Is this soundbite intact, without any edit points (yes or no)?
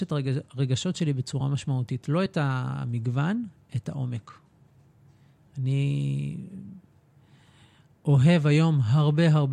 yes